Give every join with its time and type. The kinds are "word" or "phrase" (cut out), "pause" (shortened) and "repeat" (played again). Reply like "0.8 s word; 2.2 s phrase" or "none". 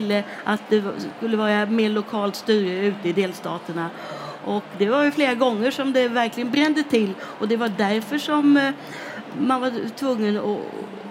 none